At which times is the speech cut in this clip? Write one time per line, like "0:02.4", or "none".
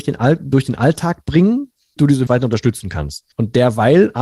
0:02.0
0:02.3
0:03.3